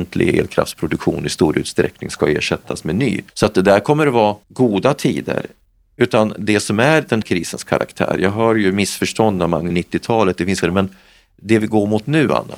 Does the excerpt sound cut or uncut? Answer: cut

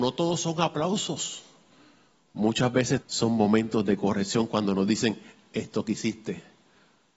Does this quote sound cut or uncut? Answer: cut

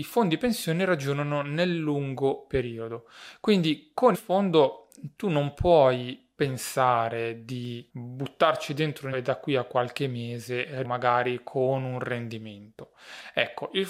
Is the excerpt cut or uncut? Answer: cut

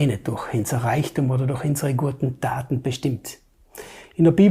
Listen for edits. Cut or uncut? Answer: uncut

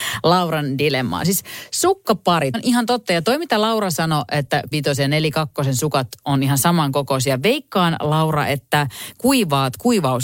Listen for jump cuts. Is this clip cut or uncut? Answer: cut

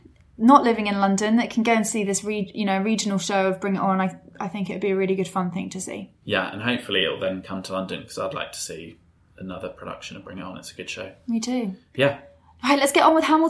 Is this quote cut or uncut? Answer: uncut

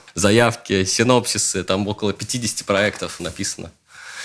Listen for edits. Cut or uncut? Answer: cut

